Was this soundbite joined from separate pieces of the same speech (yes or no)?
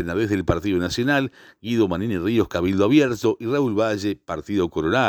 no